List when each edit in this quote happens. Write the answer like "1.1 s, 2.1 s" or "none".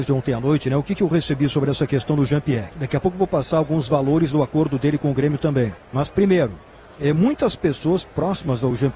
5.8 s